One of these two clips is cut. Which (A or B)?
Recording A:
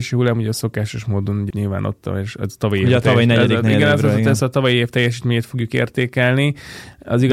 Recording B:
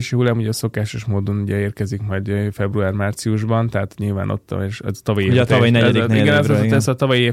A